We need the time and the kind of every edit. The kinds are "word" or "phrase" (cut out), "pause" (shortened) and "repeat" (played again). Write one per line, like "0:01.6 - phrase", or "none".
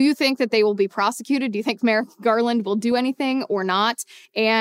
none